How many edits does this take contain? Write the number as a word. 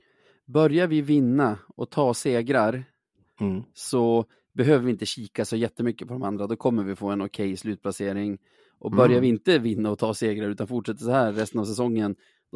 zero